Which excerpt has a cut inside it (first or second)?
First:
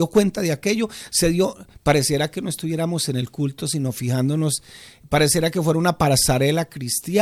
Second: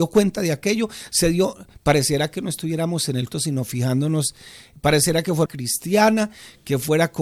second